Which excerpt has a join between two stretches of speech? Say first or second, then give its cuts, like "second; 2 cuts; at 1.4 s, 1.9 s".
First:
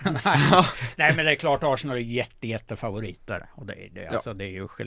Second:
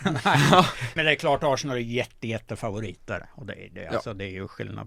second; 1 cut; at 1.0 s